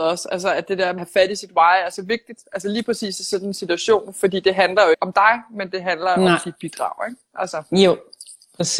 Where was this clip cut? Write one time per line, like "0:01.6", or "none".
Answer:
0:01.0
0:04.9

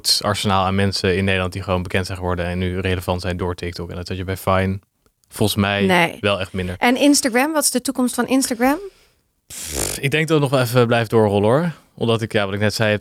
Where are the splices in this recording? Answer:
none

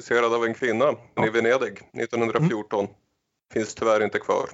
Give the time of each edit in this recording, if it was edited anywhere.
0:01.2

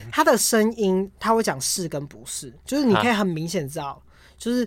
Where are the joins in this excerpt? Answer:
0:02.6

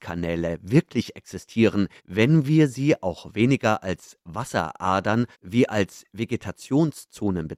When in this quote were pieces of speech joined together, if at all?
0:02.0
0:05.3

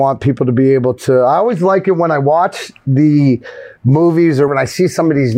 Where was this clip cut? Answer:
0:04.5

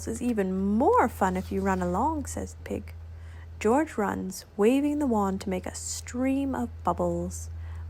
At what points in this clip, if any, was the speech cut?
0:02.6

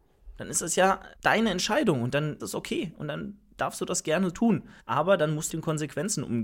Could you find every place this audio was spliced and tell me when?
0:01.2
0:02.4
0:04.8
0:05.5

